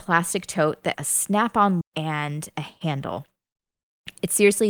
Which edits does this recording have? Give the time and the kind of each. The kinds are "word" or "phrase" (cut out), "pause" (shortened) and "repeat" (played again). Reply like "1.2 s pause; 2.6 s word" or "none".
0.9 s word; 1.8 s word